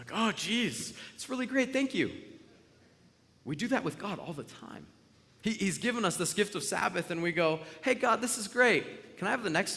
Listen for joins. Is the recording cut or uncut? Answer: uncut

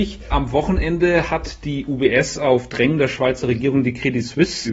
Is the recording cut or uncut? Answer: uncut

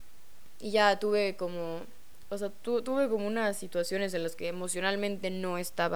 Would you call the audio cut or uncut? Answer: cut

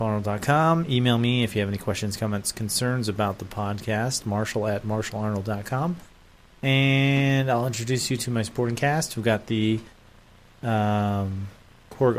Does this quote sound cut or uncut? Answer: uncut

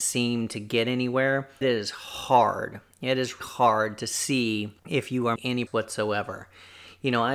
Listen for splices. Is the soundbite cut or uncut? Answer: cut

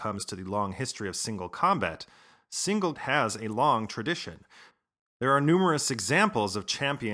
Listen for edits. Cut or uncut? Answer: cut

